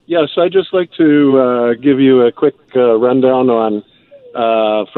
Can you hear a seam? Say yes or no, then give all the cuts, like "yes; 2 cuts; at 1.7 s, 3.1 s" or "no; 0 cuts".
no; 0 cuts